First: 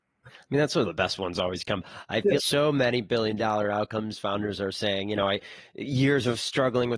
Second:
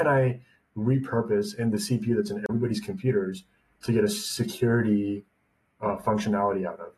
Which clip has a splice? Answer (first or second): first